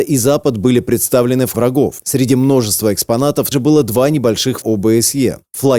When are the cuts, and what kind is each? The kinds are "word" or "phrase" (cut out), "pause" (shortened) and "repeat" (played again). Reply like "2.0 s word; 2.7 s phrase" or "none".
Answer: 1.5 s word; 3.5 s word; 4.6 s word

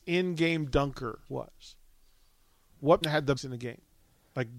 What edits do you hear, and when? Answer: 1.2 s pause; 3.0 s word; 3.4 s phrase

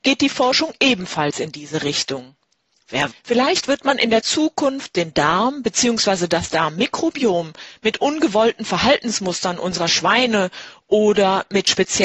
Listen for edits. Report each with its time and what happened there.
3.1 s word

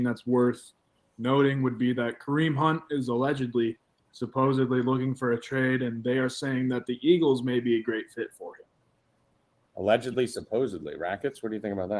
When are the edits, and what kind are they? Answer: none

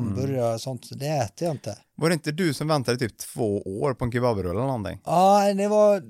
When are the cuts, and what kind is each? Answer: none

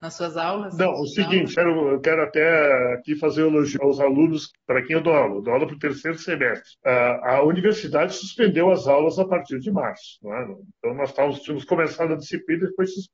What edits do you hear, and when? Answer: 1.5 s word; 3.8 s word; 6.8 s pause

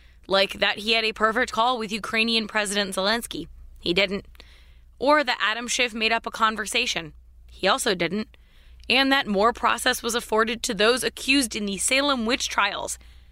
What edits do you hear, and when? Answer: none

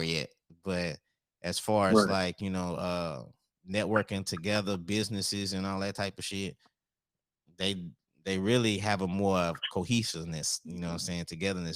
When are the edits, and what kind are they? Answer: none

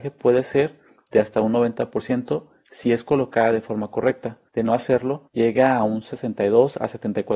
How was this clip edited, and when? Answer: 4.5 s pause; 5.3 s pause

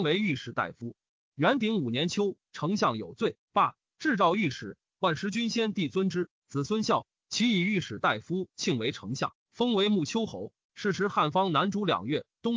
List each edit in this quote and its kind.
10.6 s pause

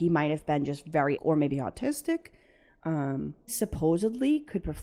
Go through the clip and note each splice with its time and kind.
1.2 s word; 3.5 s word

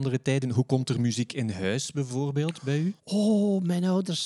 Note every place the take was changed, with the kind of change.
3.0 s pause

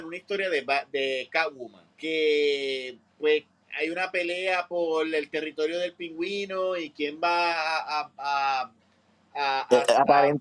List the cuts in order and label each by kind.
1.9 s pause; 3.6 s pause

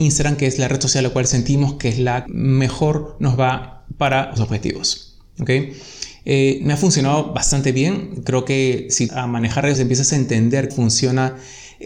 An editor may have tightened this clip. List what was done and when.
2.3 s word; 4.4 s phrase; 9.1 s phrase; 9.7 s word; 10.7 s word

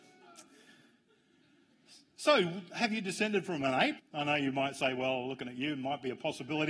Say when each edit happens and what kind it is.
4.0 s pause

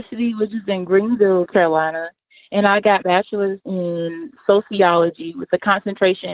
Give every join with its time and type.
1.5 s word; 3.0 s word; 3.6 s word

